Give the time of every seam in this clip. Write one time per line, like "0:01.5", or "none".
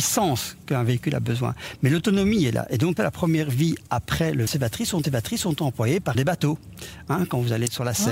0:03.0
0:04.5
0:05.0
0:06.1